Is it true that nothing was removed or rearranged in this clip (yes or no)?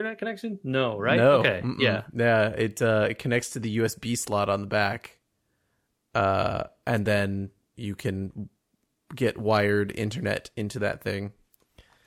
yes